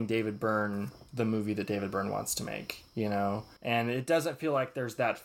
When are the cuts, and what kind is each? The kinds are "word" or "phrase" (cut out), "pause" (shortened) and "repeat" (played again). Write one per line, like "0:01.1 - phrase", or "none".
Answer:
0:03.6 - pause